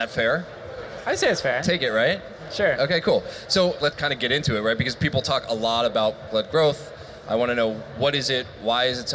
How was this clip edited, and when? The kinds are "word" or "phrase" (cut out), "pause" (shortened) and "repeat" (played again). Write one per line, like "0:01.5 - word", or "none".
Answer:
0:03.9 - word
0:06.3 - word